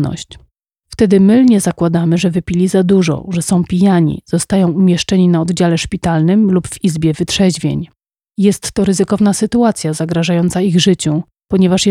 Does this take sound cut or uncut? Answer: uncut